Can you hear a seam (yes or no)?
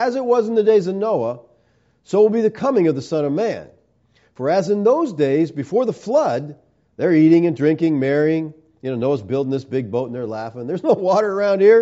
no